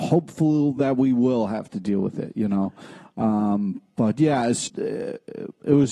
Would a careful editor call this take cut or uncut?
cut